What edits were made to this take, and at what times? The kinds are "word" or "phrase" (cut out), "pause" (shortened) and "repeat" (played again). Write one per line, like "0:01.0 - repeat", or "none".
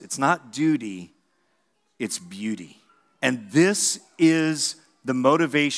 0:02.9 - pause

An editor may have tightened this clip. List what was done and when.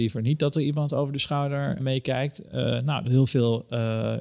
0:01.8 - word
0:03.0 - phrase

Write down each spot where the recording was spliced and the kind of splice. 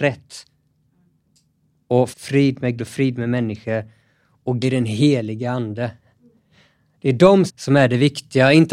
0:02.1 - word
0:02.8 - word
0:04.6 - word
0:07.5 - word

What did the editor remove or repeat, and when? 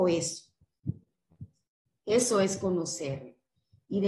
none

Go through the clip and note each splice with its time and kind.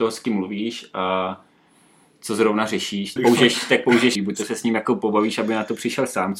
0:03.2 - word
0:04.1 - phrase

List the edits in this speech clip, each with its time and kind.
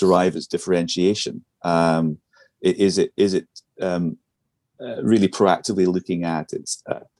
none

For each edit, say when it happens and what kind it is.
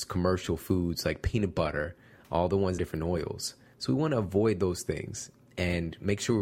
0:02.8 - phrase

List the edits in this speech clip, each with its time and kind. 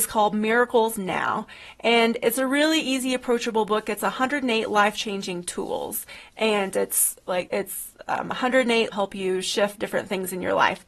0:07.5 - word
0:08.9 - phrase

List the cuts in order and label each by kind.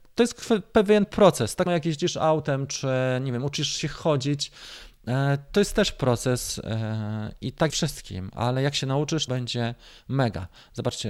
0:01.7 - word
0:07.7 - phrase
0:09.3 - word

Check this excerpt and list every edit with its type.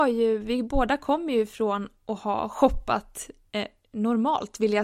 none

